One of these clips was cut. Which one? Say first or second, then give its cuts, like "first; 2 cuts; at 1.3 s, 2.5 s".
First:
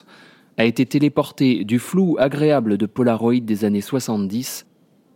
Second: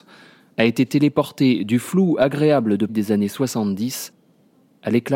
second; 1 cut; at 2.9 s